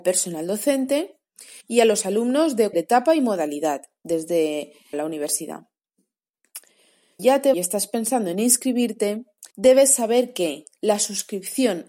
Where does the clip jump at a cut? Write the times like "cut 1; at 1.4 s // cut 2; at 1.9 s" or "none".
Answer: cut 1; at 1.6 s // cut 2; at 2.7 s // cut 3; at 4.9 s // cut 4; at 7.2 s // cut 5; at 7.5 s // cut 6; at 9.5 s

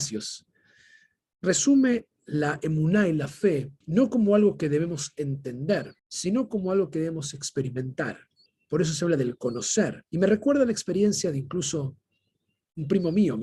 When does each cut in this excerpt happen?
cut 1; at 2.2 s // cut 2; at 3.8 s // cut 3; at 6.0 s // cut 4; at 8.5 s // cut 5; at 10.1 s

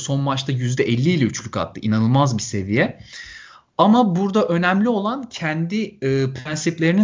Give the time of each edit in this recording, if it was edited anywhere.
none

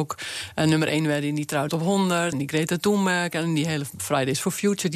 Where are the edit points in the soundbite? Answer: cut 1; at 1.7 s // cut 2; at 2.3 s

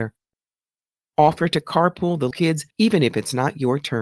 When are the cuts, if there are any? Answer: cut 1; at 2.3 s // cut 2; at 2.7 s

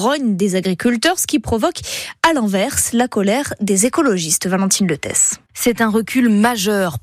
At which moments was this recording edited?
cut 1; at 5.5 s

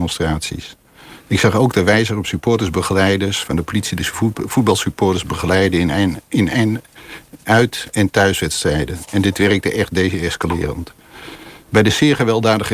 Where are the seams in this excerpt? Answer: none

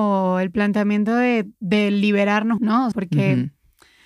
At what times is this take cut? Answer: cut 1; at 1.5 s // cut 2; at 2.6 s // cut 3; at 2.9 s

